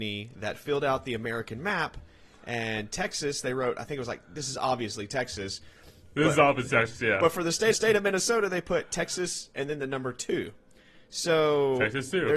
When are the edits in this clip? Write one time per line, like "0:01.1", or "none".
0:07.7